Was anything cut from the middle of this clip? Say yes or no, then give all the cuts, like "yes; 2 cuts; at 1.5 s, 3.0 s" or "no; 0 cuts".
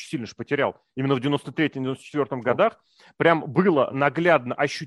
no; 0 cuts